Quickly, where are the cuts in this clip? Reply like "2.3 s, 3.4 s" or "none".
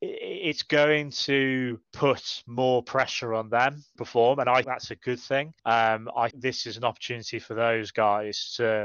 1.8 s, 4.0 s, 4.6 s, 5.6 s, 6.3 s

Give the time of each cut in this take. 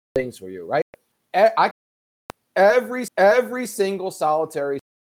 1.7 s, 3.1 s

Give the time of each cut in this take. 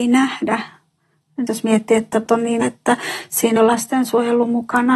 1.5 s, 2.3 s, 2.6 s, 3.6 s

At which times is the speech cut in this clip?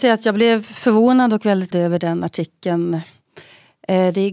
1.7 s

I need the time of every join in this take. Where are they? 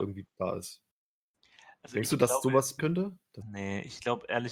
2.8 s, 3.4 s

